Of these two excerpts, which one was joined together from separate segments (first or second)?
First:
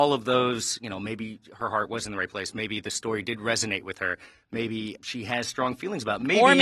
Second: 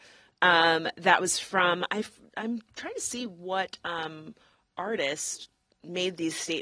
first